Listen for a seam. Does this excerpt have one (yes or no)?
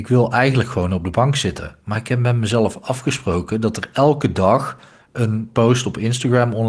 no